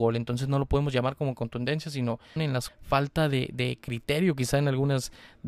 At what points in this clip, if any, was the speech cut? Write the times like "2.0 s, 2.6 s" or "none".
2.4 s, 2.7 s